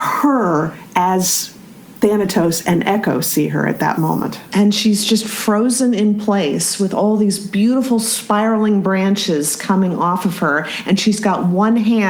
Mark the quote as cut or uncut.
uncut